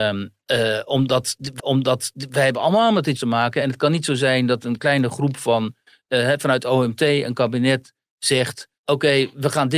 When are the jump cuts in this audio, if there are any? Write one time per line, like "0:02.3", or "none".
0:01.6
0:03.2
0:08.8